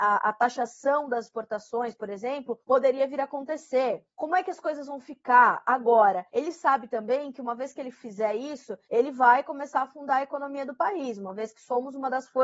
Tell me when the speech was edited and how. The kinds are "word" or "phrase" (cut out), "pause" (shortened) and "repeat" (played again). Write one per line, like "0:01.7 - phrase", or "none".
0:02.6 - pause
0:04.1 - pause
0:06.3 - pause
0:08.8 - pause